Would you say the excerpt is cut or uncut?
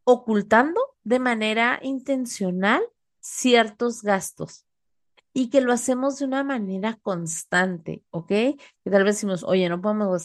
uncut